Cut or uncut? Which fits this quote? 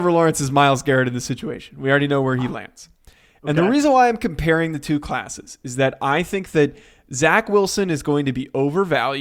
uncut